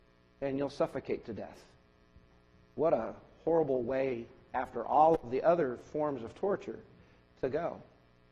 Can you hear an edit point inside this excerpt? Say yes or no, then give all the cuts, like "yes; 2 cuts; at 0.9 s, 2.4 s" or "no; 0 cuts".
no; 0 cuts